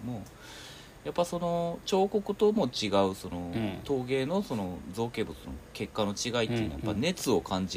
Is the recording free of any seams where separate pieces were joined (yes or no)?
yes